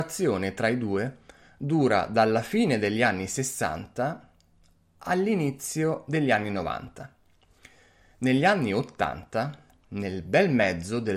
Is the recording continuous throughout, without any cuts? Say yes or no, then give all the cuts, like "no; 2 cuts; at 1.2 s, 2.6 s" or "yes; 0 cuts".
yes; 0 cuts